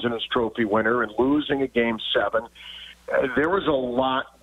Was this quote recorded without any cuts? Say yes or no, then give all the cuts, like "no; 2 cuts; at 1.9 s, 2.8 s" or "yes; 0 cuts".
yes; 0 cuts